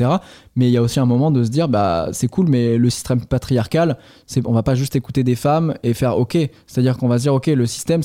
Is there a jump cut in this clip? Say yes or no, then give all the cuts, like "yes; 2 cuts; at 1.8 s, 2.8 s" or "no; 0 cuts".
no; 0 cuts